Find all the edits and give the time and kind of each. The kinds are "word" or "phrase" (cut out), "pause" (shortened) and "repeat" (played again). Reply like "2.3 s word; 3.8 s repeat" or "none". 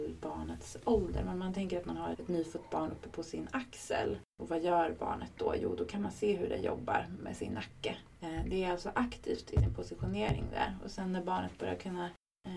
2.1 s word

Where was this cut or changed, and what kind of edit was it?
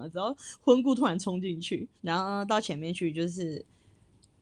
2.0 s pause

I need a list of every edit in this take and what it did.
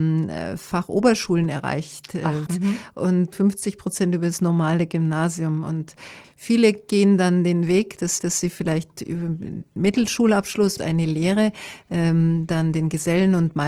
2.5 s word; 3.3 s phrase; 6.2 s word; 8.2 s repeat; 10.8 s phrase

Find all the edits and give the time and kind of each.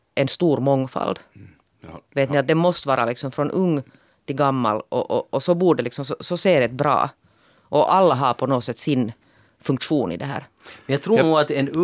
none

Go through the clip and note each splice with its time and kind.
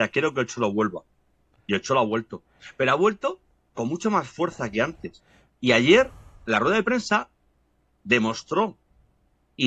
3.7 s word

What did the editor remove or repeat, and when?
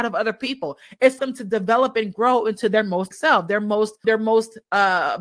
1.2 s word; 3.1 s word; 4.0 s word

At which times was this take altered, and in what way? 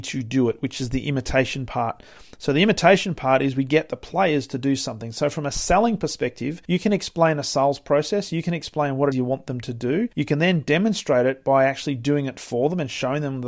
6.6 s pause; 9.1 s word; 10.1 s pause

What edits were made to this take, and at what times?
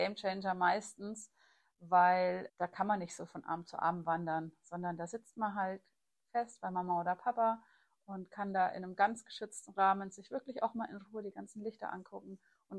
2.5 s word

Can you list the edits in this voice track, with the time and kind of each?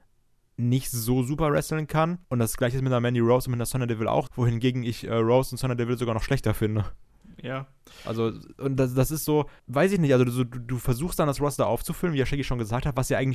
2.2 s pause; 4.3 s word; 9.6 s pause

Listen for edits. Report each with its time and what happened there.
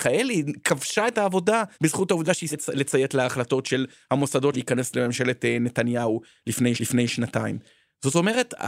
1.1 s word; 1.7 s pause; 2.5 s word; 4.5 s word; 6.8 s repeat

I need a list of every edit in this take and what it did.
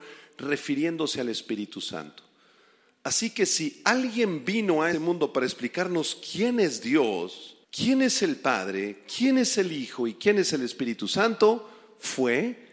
4.9 s word; 7.6 s pause

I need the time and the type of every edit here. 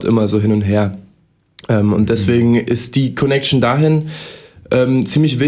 none

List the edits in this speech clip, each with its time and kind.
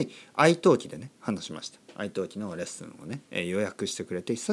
3.3 s pause

